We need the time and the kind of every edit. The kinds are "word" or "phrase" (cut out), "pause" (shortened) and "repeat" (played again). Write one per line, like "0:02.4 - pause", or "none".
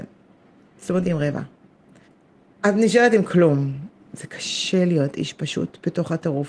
0:01.0 - word
0:02.0 - pause